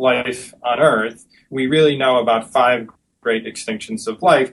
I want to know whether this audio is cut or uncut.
uncut